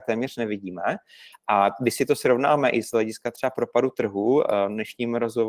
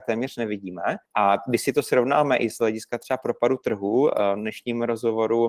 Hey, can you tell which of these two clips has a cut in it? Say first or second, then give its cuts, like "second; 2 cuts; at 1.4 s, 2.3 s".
second; 1 cut; at 1.1 s